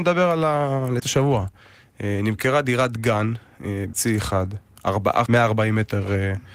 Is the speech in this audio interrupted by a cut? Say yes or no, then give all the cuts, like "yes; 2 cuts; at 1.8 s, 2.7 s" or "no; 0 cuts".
yes; 3 cuts; at 1.0 s, 3.9 s, 5.3 s